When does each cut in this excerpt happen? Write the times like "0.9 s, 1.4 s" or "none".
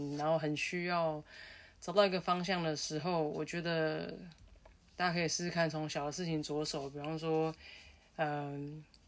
none